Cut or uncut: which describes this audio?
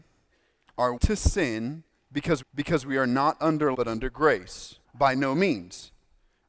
cut